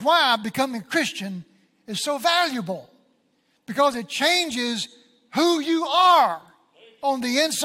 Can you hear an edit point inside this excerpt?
no; 0 cuts

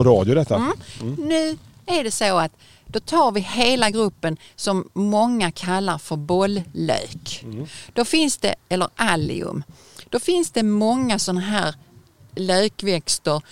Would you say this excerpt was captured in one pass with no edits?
yes; 0 cuts

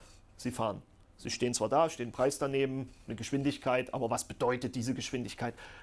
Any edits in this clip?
no; 0 cuts

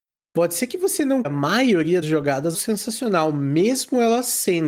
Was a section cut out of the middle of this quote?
yes; 3 cuts; at 1.2 s, 2.0 s, 2.5 s

